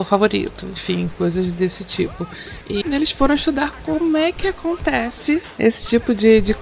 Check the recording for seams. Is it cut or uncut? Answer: cut